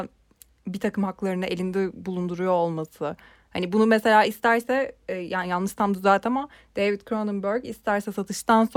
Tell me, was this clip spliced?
no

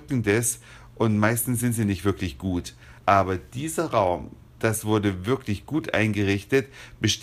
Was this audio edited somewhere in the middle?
yes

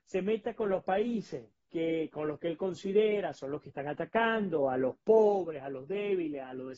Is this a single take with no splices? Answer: yes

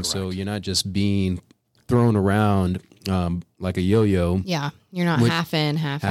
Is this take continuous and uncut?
yes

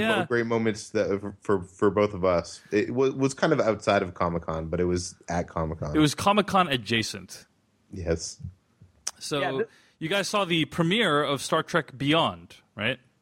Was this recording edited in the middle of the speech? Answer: no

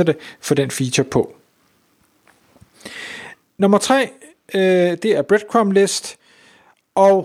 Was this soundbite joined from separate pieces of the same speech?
no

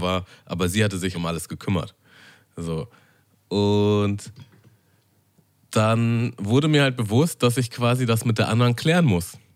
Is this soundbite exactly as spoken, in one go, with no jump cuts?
no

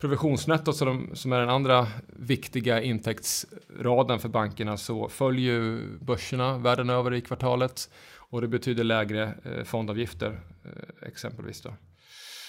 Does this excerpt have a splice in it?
no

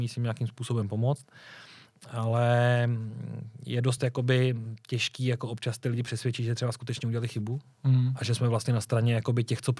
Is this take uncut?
yes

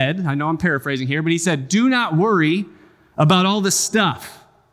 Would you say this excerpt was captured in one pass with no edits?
yes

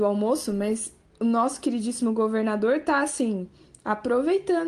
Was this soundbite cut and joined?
no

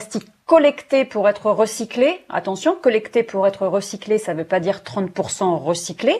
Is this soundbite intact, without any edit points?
yes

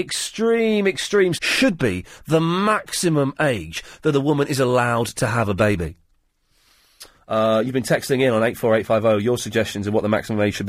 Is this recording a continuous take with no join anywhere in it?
no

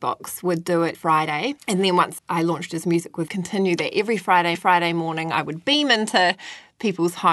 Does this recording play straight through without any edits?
no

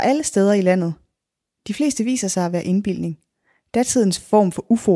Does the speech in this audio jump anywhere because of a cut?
no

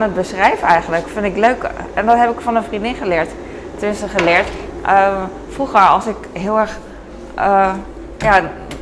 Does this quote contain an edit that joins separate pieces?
no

